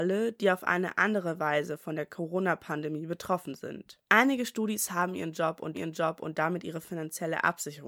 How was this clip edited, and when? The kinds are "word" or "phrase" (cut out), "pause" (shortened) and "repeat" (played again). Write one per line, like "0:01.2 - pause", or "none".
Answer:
0:05.7 - repeat